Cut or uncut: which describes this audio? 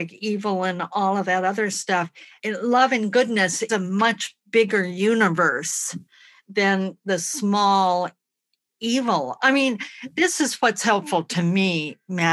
cut